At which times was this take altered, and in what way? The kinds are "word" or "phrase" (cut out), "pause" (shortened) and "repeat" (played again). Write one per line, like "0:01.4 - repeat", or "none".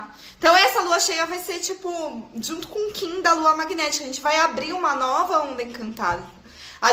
none